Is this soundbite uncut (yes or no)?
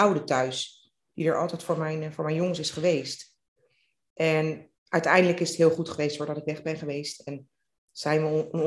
no